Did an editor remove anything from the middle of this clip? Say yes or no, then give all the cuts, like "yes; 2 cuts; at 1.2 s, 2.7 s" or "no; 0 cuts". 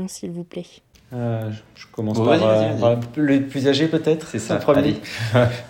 no; 0 cuts